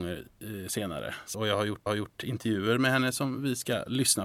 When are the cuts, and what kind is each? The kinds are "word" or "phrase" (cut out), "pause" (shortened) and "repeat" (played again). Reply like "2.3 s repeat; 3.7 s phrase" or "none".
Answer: 1.3 s word; 1.9 s repeat